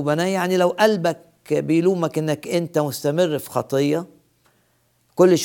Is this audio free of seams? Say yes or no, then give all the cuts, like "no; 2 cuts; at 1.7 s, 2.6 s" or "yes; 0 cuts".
yes; 0 cuts